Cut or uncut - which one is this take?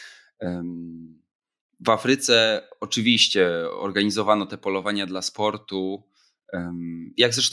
uncut